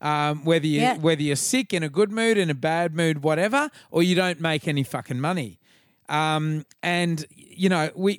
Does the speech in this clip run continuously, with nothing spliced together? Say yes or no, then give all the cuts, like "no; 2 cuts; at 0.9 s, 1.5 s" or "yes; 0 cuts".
yes; 0 cuts